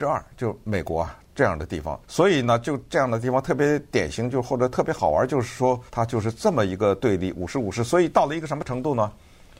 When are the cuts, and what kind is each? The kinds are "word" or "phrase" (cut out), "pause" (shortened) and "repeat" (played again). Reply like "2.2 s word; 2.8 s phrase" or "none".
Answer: 2.0 s pause; 5.9 s pause